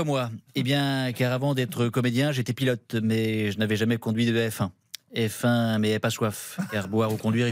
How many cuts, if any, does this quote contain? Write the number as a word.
zero